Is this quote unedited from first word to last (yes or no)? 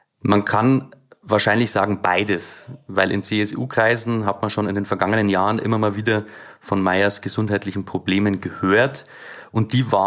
yes